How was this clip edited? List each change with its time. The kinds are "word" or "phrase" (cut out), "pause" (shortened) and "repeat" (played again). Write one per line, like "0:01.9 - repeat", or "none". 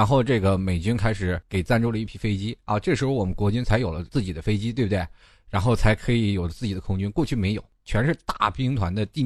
none

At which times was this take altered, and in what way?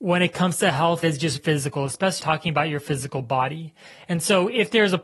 0:01.0 - word
0:01.4 - word
0:02.2 - word

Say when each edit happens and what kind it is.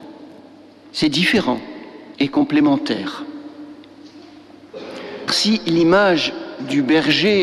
0:02.1 - pause
0:05.3 - word

